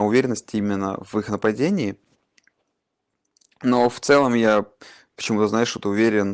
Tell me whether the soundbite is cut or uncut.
uncut